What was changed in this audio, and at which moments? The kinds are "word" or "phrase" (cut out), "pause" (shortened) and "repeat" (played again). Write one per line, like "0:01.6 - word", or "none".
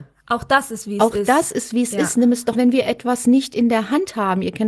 0:02.5 - phrase